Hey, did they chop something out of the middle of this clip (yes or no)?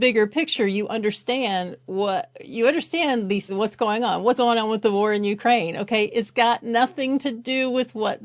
yes